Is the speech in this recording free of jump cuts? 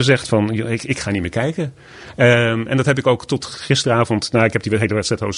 yes; 0 cuts

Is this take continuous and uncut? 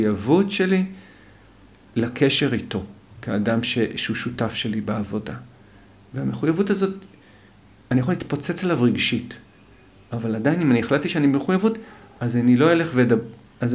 yes; 0 cuts

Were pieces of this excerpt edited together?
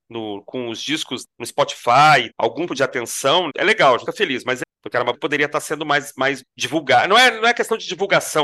yes; 8 cuts; at 1.2 s, 2.3 s, 2.7 s, 3.5 s, 4.1 s, 4.6 s, 5.1 s, 6.4 s

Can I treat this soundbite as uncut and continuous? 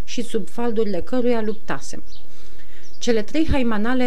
yes; 0 cuts

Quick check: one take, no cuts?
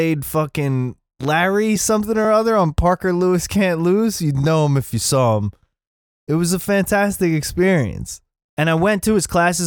yes; 0 cuts

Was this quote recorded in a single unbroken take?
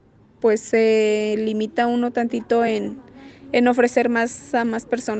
yes; 0 cuts

